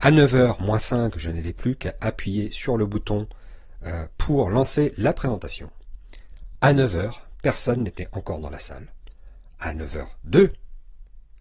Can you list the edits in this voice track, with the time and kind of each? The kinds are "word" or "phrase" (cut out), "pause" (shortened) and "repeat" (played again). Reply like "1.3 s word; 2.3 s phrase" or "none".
none